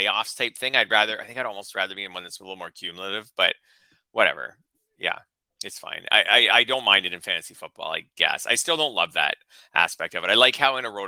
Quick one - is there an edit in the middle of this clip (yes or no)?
no